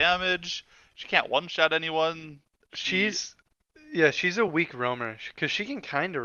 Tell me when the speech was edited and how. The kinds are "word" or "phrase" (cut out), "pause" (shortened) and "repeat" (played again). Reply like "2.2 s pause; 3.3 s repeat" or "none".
none